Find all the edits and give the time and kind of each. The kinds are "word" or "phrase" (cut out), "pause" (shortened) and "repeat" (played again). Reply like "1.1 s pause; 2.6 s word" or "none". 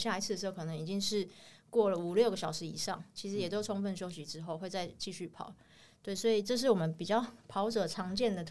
none